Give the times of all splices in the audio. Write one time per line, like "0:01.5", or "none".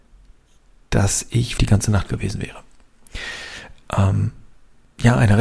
0:01.6
0:02.1